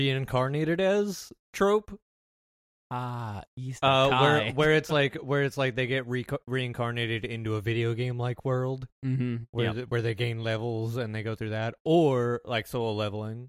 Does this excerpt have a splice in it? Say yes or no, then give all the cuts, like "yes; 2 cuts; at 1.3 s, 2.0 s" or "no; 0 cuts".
no; 0 cuts